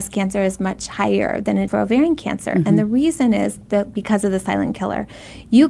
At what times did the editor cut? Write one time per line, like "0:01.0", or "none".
0:01.7